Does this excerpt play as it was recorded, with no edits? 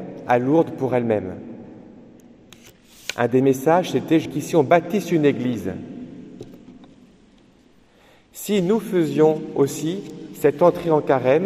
no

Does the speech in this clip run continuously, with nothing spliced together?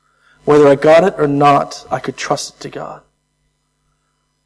yes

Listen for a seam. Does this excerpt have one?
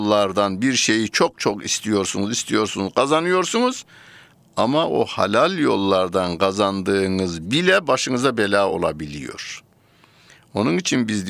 no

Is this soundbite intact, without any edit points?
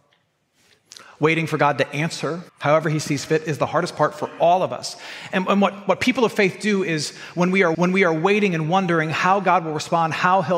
no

